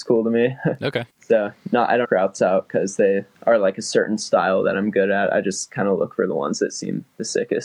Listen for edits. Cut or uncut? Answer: cut